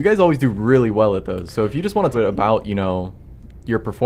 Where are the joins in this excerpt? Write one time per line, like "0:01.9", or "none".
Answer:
0:02.1